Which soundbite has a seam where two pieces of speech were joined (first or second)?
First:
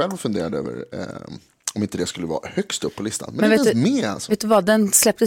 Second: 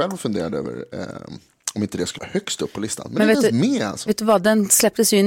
second